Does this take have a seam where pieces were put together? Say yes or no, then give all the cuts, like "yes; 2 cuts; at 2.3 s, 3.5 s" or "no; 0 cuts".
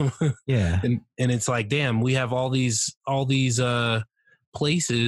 no; 0 cuts